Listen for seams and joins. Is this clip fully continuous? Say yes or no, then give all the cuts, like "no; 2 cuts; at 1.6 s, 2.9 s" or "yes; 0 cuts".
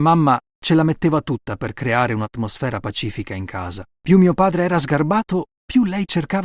no; 1 cut; at 3.9 s